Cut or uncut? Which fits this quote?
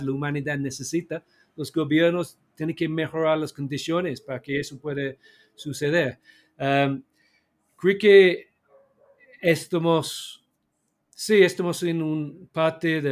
uncut